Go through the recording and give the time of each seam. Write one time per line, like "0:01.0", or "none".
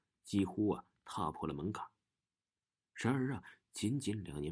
none

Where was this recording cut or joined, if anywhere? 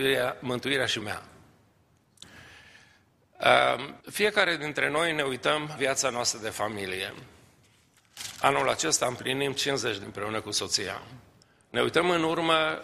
0:01.0
0:04.0
0:05.8
0:10.0
0:11.4

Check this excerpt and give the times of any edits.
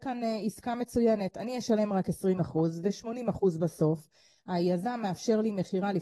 none

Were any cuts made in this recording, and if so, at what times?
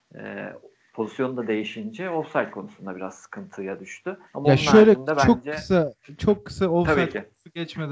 0:04.3

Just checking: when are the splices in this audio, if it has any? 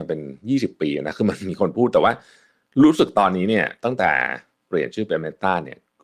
0:04.7

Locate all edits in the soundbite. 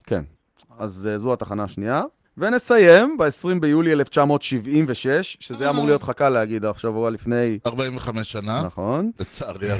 0:02.2

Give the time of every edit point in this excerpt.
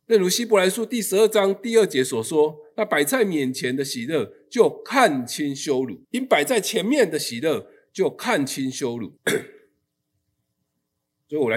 0:06.0
0:09.2

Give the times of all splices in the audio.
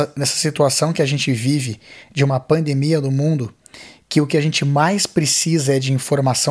none

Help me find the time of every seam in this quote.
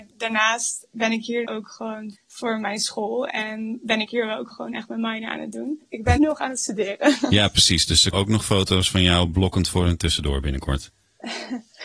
0:01.4
0:02.1
0:04.5
0:06.2
0:08.1
0:10.0

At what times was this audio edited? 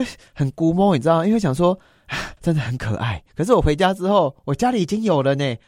0:02.4
0:03.3

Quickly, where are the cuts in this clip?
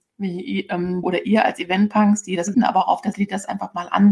0:01.0
0:02.5
0:03.1

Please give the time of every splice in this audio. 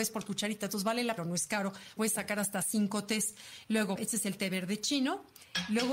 0:01.2
0:02.0
0:04.0

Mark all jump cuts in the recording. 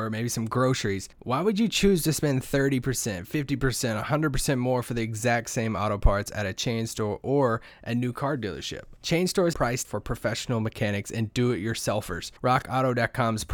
0:01.1
0:09.0
0:09.5
0:09.8
0:12.4

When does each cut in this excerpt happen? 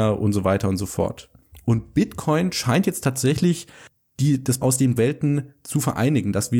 0:04.6
0:05.0

